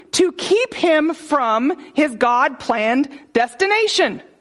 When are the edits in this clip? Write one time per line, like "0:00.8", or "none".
none